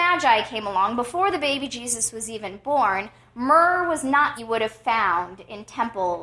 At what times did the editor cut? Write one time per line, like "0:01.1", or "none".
0:04.4